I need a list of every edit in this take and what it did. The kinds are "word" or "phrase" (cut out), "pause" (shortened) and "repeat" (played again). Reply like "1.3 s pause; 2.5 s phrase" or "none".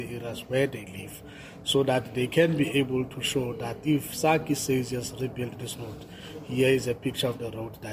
none